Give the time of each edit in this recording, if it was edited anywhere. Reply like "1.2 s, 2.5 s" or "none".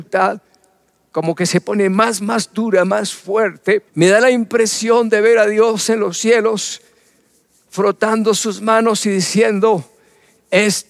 3.9 s